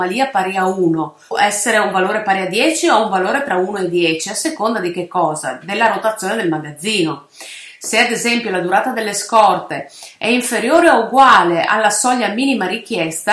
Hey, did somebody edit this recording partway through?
yes; 1 cut; at 1.3 s

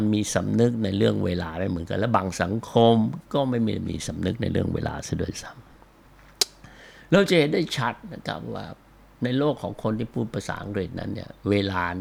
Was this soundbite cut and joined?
no; 0 cuts

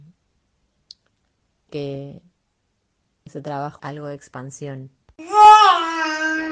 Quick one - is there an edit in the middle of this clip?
yes; 3 cuts; at 1.7 s, 3.3 s, 3.8 s

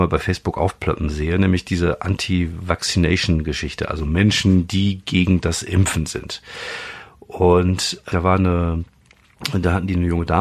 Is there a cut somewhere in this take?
yes; 1 cut; at 8.1 s

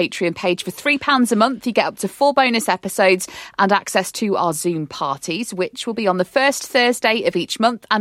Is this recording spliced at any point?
no; 0 cuts

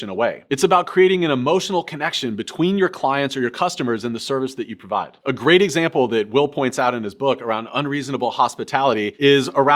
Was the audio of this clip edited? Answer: no; 0 cuts

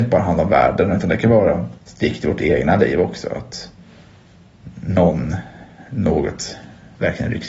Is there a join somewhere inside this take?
yes; 1 cut; at 1.8 s

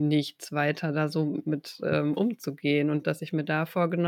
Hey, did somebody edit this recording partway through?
no; 0 cuts

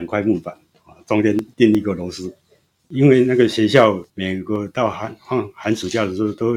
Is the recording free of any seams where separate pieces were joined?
yes; 0 cuts

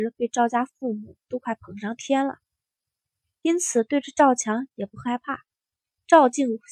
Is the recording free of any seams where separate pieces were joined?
yes; 0 cuts

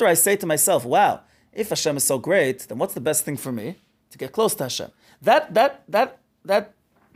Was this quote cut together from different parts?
no; 0 cuts

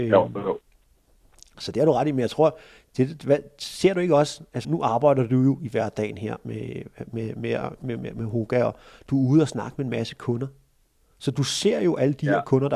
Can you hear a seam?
yes; 1 cut; at 4.6 s

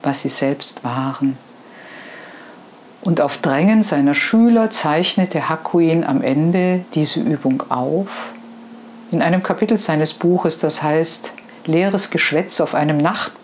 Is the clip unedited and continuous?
yes; 0 cuts

